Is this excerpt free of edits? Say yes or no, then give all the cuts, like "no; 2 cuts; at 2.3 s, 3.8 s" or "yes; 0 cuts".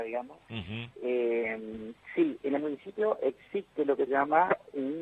no; 2 cuts; at 0.9 s, 4.1 s